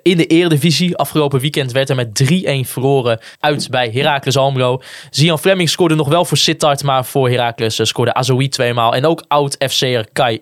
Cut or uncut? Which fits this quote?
cut